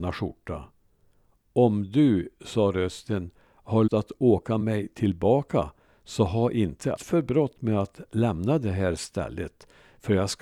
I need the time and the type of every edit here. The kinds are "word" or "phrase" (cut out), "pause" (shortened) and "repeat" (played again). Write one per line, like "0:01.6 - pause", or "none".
0:03.9 - word
0:04.6 - word
0:07.0 - word